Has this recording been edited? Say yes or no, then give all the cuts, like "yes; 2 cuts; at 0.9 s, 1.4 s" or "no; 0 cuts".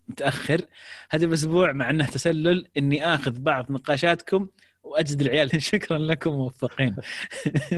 yes; 1 cut; at 5.5 s